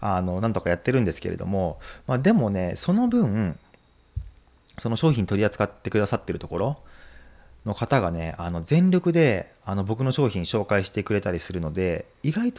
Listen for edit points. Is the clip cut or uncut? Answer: uncut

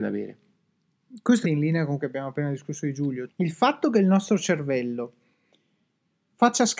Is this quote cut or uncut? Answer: cut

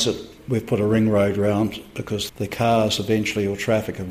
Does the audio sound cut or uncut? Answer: cut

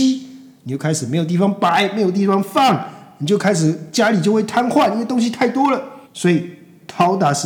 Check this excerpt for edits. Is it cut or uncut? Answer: cut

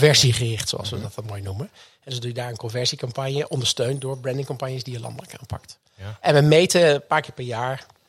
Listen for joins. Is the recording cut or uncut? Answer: uncut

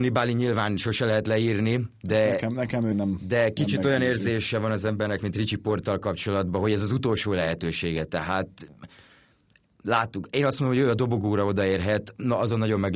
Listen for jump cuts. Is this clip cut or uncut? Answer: cut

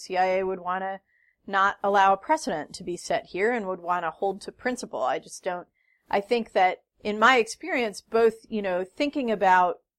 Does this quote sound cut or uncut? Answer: cut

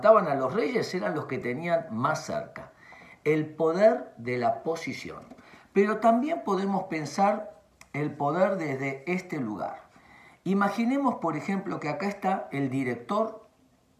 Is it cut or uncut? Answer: uncut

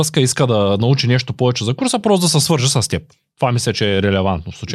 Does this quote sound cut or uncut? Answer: uncut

